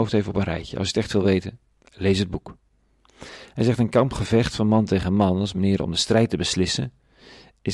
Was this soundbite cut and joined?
no; 0 cuts

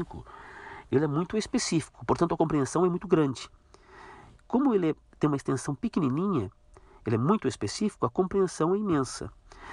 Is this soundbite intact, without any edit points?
yes; 0 cuts

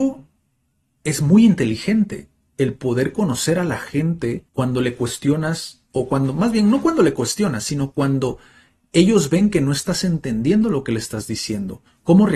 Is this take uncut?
no; 1 cut; at 4.5 s

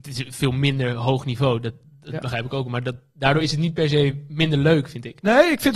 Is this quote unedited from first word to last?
yes; 0 cuts

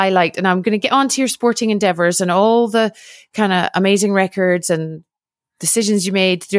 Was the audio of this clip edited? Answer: no; 0 cuts

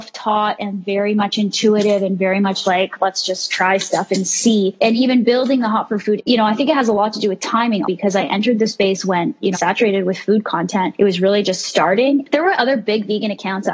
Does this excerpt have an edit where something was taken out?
yes; 4 cuts; at 2.6 s, 6.2 s, 7.8 s, 9.5 s

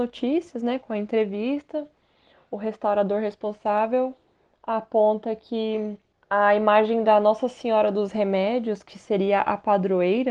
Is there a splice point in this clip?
no; 0 cuts

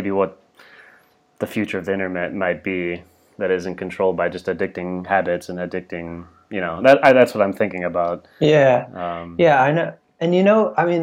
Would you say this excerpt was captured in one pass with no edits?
yes; 0 cuts

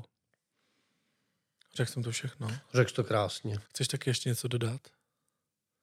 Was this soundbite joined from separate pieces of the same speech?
yes; 1 cut; at 3.7 s

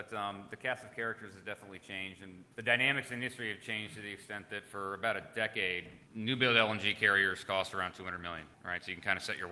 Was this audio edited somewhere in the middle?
yes; 3 cuts; at 2.5 s, 6.1 s, 8.5 s

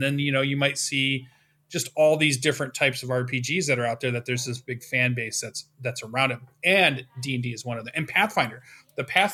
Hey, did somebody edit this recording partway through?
no; 0 cuts

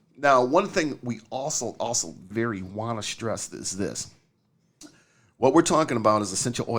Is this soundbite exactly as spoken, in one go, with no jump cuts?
no; 1 cut; at 2.3 s

